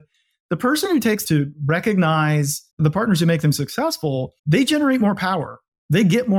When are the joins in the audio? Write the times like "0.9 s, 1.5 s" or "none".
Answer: 1.2 s, 2.7 s, 4.4 s